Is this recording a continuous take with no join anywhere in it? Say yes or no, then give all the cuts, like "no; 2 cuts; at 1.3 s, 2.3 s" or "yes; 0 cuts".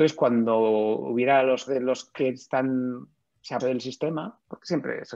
no; 2 cuts; at 1.7 s, 3.6 s